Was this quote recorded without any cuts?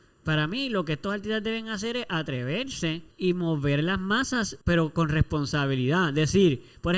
no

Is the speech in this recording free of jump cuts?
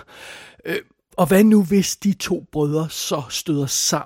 no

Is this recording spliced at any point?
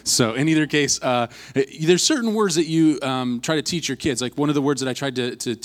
no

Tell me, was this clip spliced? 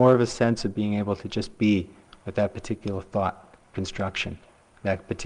no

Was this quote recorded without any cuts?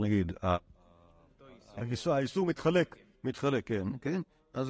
yes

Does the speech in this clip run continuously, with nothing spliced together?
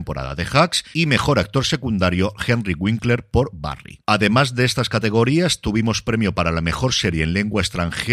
no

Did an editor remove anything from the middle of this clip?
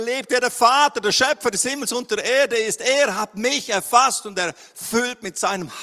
no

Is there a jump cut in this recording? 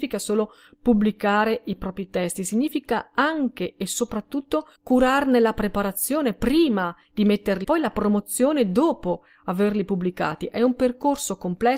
yes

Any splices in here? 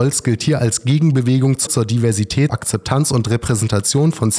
yes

